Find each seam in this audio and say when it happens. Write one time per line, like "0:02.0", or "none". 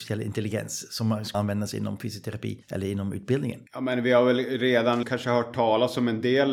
0:01.3
0:02.6
0:03.7
0:05.0

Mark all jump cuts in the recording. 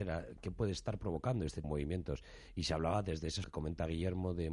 0:01.6
0:03.4

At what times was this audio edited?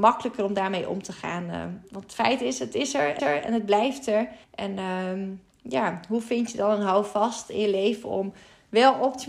0:03.2
0:04.4

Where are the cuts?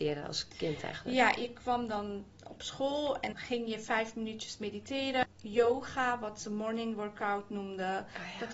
0:03.3

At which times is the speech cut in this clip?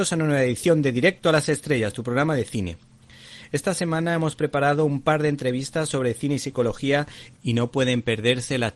0:07.4

